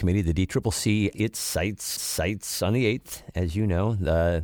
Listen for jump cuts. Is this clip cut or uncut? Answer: cut